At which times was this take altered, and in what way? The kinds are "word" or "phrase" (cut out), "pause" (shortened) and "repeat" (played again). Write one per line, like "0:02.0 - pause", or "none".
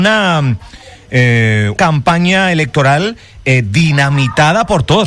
0:01.8 - word